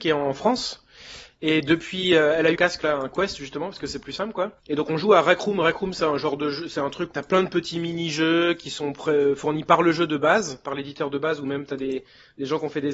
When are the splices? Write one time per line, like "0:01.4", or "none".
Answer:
0:02.6
0:04.6
0:07.1